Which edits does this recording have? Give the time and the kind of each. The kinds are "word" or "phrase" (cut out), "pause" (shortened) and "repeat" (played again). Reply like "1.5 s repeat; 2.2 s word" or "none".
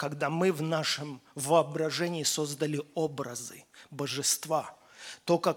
none